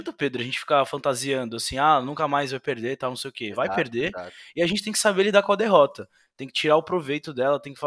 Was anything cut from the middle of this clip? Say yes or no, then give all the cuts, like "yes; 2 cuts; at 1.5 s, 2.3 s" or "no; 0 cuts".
no; 0 cuts